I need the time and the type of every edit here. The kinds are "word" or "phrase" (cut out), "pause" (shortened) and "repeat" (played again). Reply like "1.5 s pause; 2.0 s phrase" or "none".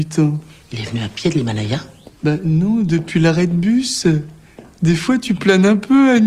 none